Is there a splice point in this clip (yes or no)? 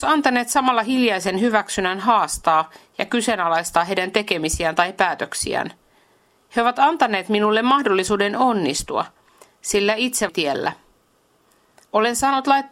yes